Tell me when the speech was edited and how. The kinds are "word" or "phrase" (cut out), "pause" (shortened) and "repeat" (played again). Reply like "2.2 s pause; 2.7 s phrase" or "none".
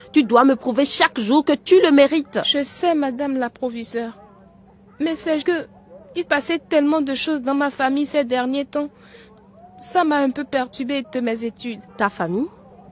5.4 s word; 6.2 s word; 11.0 s word; 11.9 s pause